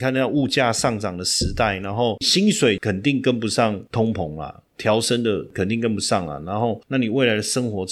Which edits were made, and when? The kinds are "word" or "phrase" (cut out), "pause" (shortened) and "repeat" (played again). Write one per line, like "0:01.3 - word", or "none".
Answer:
none